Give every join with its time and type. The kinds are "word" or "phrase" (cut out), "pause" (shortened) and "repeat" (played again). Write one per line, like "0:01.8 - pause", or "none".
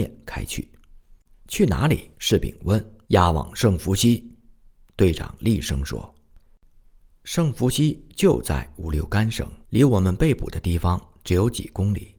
0:02.1 - pause
0:03.0 - pause
0:09.6 - pause